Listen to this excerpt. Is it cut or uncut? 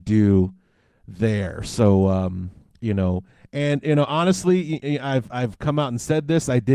uncut